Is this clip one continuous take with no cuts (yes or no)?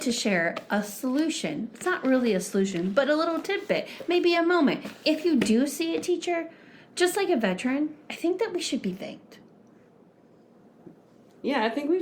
yes